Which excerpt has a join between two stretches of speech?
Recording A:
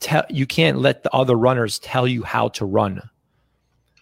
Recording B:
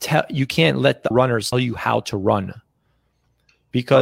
B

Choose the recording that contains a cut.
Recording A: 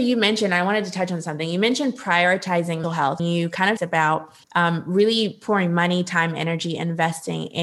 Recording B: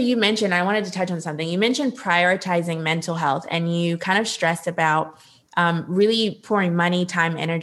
A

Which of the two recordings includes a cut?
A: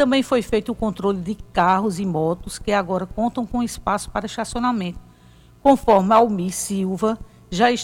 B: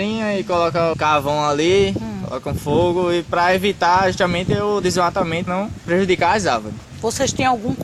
B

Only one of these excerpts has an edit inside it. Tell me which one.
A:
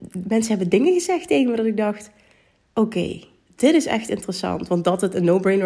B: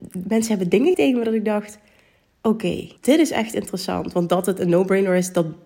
B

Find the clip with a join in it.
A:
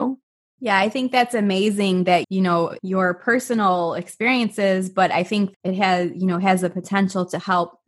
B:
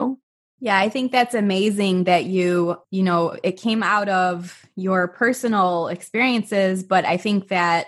A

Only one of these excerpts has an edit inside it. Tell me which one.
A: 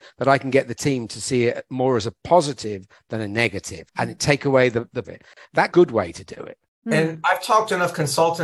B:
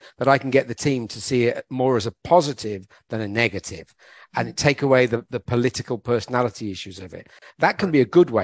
A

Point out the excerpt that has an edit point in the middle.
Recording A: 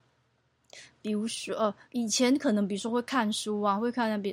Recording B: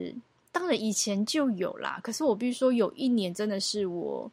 A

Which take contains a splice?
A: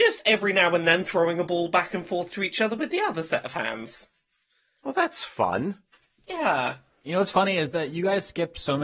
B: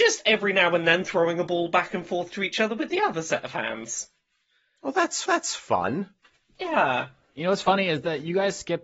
B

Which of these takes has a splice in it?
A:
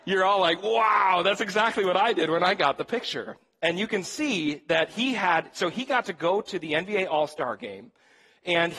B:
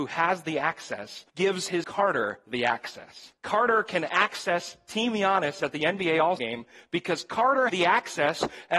B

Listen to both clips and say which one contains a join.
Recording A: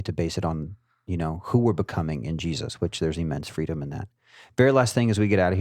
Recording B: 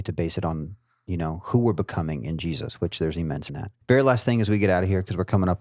B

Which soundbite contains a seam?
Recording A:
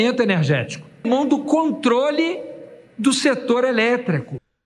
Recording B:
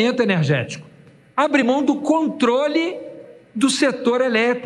A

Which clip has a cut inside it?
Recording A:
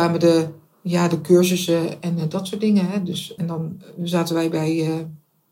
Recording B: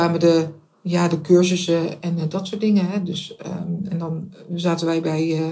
A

